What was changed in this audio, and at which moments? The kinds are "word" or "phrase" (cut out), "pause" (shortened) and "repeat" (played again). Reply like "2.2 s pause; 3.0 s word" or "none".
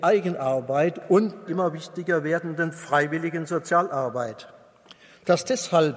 1.5 s word